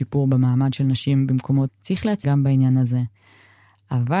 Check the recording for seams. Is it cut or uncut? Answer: cut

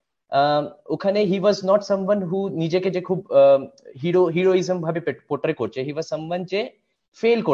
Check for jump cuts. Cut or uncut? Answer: uncut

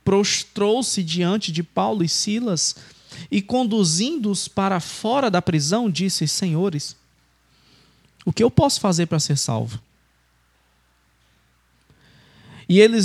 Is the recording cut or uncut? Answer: uncut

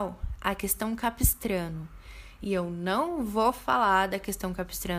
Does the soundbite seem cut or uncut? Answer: uncut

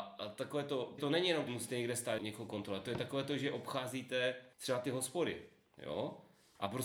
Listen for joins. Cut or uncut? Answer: cut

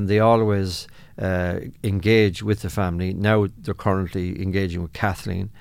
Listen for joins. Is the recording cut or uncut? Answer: uncut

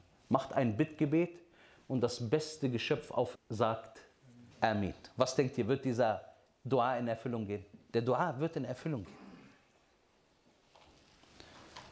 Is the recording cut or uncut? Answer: cut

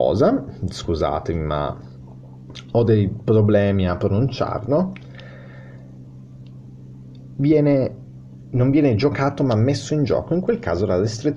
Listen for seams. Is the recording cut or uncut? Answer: uncut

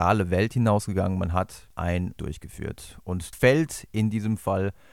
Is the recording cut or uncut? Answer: cut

